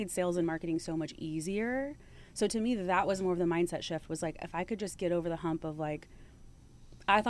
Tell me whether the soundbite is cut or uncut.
uncut